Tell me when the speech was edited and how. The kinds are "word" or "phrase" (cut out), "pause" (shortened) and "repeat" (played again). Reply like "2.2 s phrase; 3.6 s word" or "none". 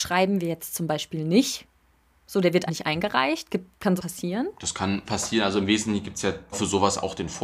2.7 s word; 4.0 s word; 5.1 s word; 6.5 s word